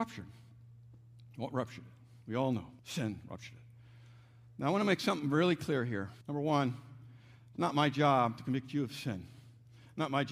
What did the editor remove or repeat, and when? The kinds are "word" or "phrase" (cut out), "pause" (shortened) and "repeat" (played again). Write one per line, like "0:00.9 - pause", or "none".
0:02.8 - pause
0:06.2 - pause